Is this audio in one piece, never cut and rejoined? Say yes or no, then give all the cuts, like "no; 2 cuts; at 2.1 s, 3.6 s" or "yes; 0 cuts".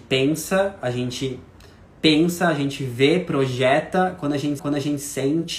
no; 1 cut; at 4.6 s